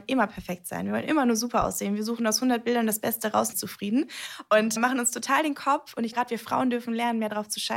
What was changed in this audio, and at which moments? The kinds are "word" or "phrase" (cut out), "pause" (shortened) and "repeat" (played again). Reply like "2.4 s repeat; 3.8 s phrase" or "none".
3.5 s phrase; 4.8 s word; 6.1 s word